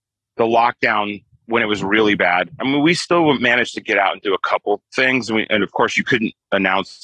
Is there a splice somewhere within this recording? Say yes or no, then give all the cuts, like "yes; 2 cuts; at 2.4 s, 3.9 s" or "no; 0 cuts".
no; 0 cuts